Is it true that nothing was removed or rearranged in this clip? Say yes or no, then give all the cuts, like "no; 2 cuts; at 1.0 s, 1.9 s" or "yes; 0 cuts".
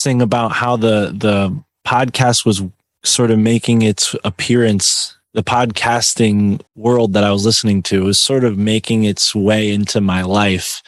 no; 1 cut; at 6.7 s